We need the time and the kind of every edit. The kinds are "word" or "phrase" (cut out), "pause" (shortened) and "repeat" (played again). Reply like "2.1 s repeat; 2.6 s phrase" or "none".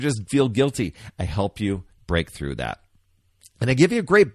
none